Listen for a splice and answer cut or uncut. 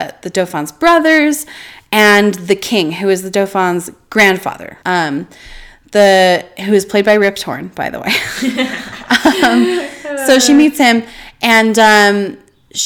cut